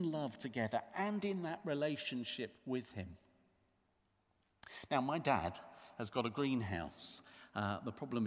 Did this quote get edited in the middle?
yes; 1 cut; at 2.6 s

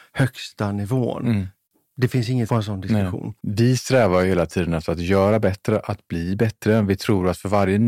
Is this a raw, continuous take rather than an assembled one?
no; 2 cuts; at 2.5 s, 3.4 s

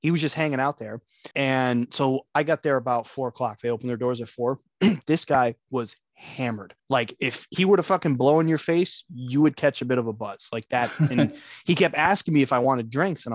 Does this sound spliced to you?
yes; 2 cuts; at 1.3 s, 6.8 s

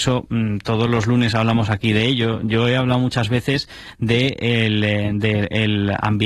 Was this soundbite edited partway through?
no; 0 cuts

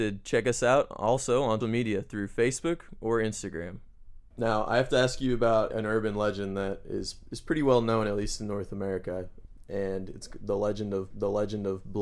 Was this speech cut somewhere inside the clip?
yes; 2 cuts; at 1.6 s, 11.1 s

